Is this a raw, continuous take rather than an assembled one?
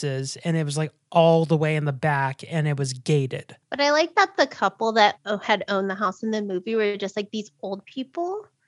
no; 1 cut; at 3.6 s

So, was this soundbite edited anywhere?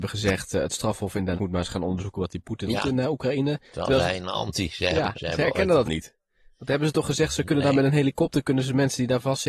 yes; 4 cuts; at 1.4 s, 2.7 s, 5.1 s, 5.9 s

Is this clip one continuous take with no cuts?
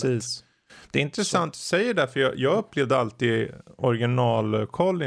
yes; 0 cuts

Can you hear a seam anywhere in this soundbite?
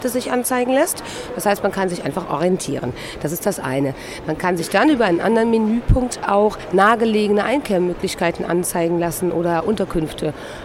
no; 0 cuts

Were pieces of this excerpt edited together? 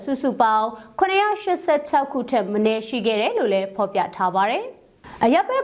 no; 0 cuts

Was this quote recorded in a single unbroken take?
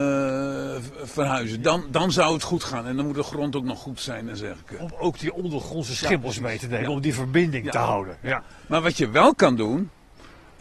yes; 0 cuts

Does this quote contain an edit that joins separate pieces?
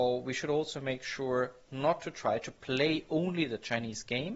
no; 0 cuts

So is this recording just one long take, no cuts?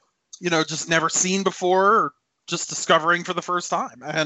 yes; 0 cuts

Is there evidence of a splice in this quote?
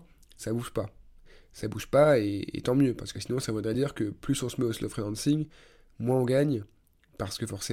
no; 0 cuts

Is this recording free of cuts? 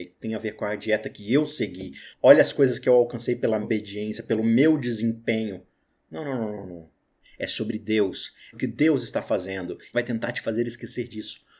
no; 3 cuts; at 3.6 s, 8.5 s, 9.9 s

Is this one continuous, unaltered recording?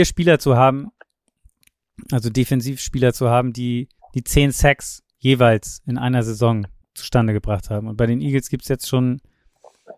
no; 3 cuts; at 4.0 s, 5.1 s, 6.8 s

